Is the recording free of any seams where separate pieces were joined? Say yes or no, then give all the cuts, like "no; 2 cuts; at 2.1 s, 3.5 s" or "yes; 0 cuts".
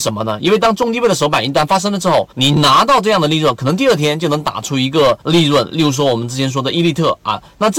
no; 2 cuts; at 2.3 s, 5.2 s